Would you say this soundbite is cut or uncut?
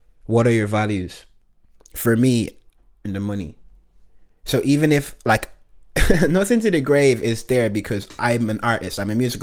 cut